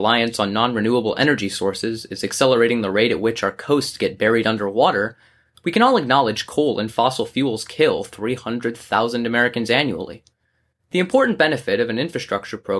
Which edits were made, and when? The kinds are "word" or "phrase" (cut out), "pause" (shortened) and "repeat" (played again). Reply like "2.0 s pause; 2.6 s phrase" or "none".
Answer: none